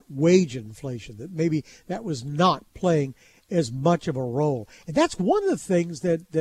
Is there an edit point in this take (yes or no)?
no